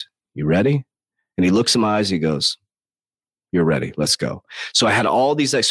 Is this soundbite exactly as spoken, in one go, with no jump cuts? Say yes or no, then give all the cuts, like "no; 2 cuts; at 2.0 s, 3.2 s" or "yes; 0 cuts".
yes; 0 cuts